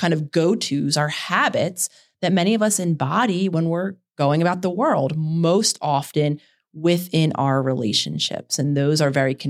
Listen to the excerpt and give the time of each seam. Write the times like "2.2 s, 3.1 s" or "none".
none